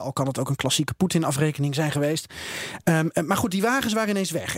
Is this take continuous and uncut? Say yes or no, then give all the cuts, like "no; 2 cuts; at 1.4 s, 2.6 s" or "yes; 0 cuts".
yes; 0 cuts